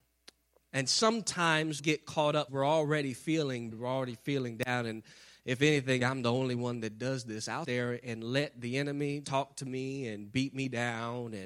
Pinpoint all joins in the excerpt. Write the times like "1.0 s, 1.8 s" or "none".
1.8 s, 2.5 s, 3.7 s, 6.0 s, 7.6 s, 9.2 s

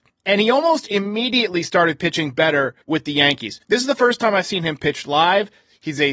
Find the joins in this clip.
2.8 s, 3.6 s

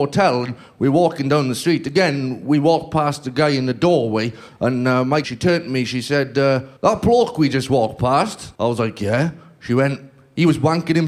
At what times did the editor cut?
5.2 s, 6.8 s, 8.6 s

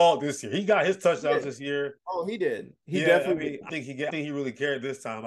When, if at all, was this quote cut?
3.7 s, 4.1 s

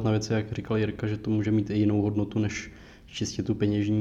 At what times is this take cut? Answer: none

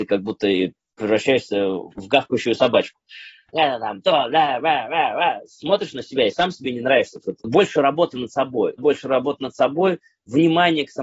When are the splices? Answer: 7.2 s, 8.8 s

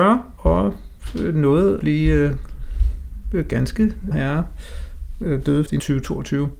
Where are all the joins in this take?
1.8 s, 4.1 s, 5.7 s

